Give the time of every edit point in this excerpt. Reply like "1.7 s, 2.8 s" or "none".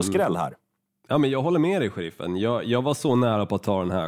none